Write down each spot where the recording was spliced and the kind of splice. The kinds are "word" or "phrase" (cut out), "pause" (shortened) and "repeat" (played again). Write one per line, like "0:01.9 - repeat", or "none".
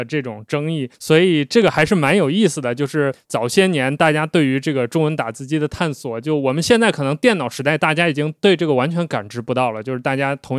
0:00.9 - pause